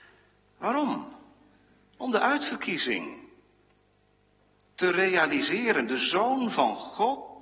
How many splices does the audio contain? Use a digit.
0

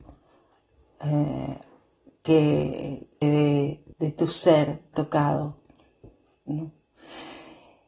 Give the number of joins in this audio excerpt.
3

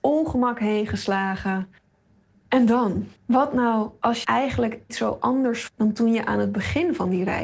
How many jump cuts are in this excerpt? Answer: 4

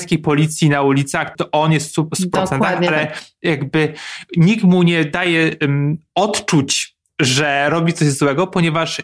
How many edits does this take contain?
1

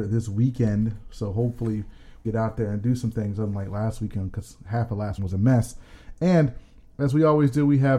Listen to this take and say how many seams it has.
2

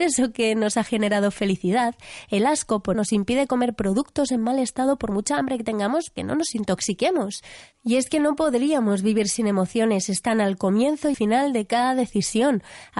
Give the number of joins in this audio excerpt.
3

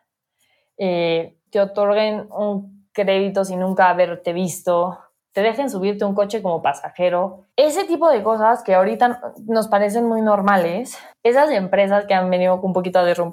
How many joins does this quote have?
3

